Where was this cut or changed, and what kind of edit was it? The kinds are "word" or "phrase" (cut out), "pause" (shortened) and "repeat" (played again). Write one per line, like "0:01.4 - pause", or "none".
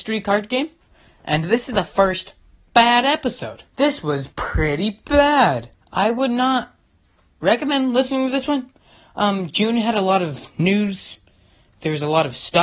0:03.7 - pause
0:04.3 - pause
0:05.7 - pause